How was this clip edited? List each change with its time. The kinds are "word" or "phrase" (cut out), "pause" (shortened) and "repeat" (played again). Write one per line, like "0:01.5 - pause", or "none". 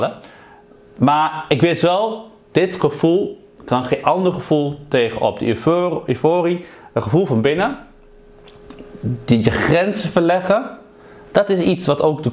none